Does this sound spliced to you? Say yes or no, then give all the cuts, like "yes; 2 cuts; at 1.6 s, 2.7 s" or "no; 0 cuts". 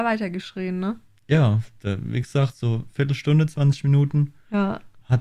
no; 0 cuts